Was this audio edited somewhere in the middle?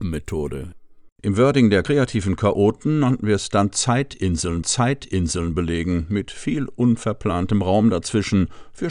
yes; 1 cut; at 4.6 s

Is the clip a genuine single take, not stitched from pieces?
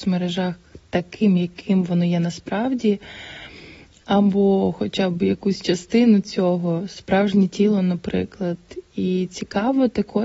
yes; 0 cuts

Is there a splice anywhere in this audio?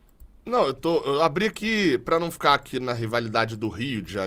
no; 0 cuts

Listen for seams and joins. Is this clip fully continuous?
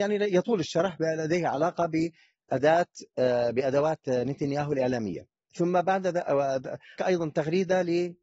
no; 1 cut; at 7.0 s

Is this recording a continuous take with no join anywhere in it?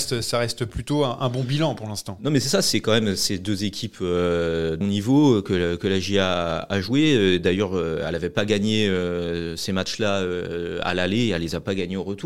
no; 1 cut; at 4.8 s

